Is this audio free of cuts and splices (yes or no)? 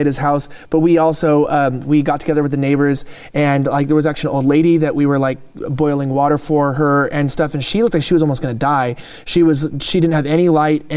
yes